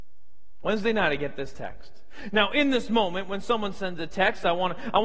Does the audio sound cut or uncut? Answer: uncut